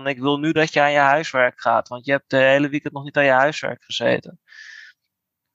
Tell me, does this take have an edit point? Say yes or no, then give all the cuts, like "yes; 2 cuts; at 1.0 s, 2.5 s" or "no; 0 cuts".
no; 0 cuts